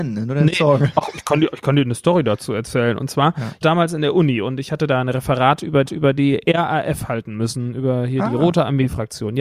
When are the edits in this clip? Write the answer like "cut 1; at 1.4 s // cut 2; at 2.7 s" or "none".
cut 1; at 3.6 s // cut 2; at 5.9 s